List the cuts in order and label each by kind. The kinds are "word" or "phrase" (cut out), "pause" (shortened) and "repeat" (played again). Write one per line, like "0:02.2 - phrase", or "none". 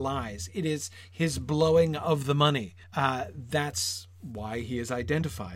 0:02.8 - pause